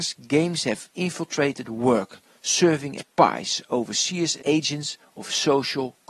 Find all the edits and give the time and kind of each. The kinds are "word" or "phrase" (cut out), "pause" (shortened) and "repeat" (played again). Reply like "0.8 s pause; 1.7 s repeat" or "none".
3.0 s word; 4.4 s word

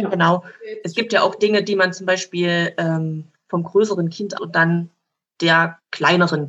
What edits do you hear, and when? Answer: 4.4 s word

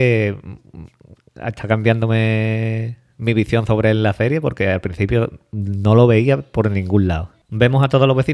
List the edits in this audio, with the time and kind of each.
none

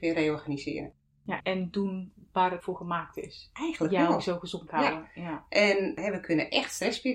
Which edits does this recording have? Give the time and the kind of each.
1.4 s word; 2.6 s word; 4.7 s word

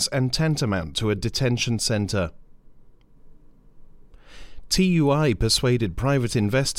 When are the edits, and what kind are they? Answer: none

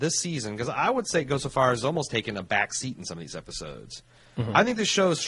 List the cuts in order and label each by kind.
1.8 s word

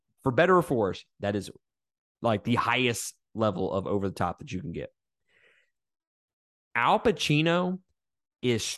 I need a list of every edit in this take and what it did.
none

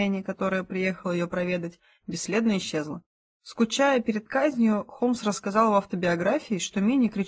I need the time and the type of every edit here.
none

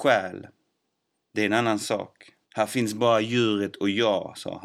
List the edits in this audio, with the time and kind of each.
2.4 s pause

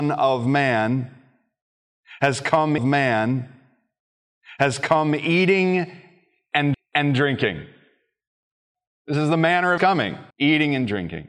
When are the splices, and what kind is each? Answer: 2.8 s repeat; 6.7 s repeat; 9.8 s word; 10.3 s pause

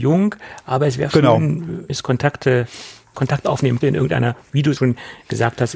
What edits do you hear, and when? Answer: 1.1 s word; 1.9 s word; 3.1 s word; 3.8 s word; 4.8 s word

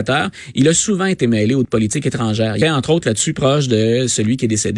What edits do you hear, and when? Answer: 1.6 s word; 2.6 s word

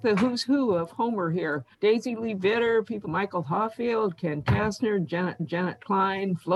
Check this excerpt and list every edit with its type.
1.7 s pause; 3.0 s word; 5.4 s repeat

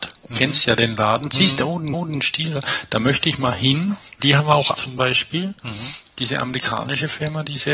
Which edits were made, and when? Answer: 1.9 s repeat; 4.2 s word; 4.7 s word

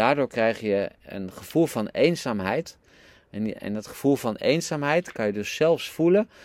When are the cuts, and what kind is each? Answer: none

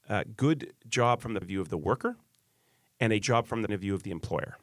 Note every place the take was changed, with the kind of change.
1.4 s word; 3.2 s word; 3.7 s word

